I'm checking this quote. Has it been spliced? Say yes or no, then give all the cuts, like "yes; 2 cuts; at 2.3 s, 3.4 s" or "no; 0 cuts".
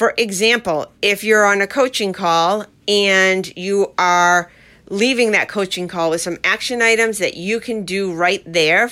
no; 0 cuts